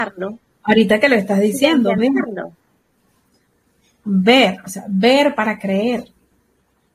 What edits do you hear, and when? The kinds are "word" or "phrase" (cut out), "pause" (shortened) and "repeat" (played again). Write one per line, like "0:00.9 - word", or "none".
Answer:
none

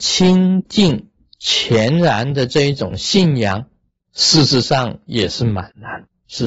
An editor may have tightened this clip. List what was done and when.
none

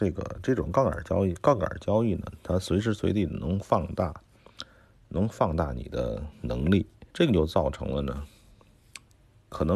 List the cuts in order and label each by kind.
0:07.1 - pause

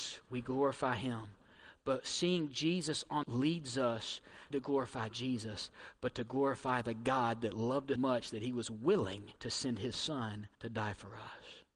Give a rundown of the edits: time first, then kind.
0:03.2 - phrase
0:04.5 - phrase
0:08.0 - word
0:09.4 - pause
0:10.5 - pause

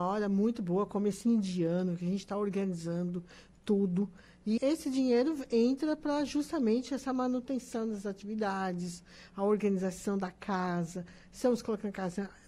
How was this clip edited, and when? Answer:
0:04.6 - word

